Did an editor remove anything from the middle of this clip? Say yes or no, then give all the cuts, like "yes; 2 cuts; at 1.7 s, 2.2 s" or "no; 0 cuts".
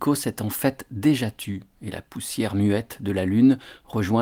no; 0 cuts